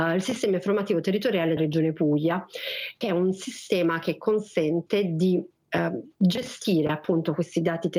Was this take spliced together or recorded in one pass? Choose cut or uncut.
cut